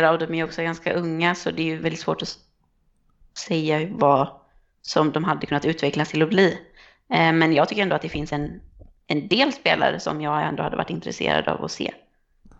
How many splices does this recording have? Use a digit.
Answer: 0